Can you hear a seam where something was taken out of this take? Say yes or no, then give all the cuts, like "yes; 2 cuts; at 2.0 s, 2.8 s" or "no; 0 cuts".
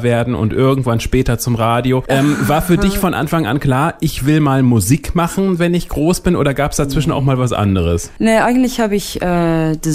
no; 0 cuts